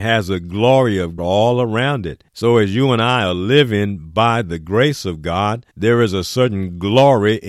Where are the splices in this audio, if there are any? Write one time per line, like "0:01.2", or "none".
0:01.2
0:02.3
0:05.7